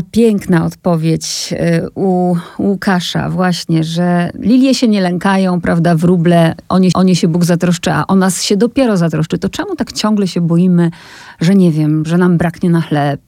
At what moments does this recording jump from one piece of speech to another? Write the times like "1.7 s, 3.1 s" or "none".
6.9 s